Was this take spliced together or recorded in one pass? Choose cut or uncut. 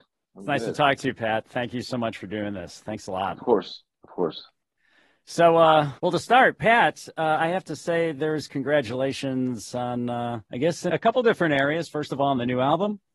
cut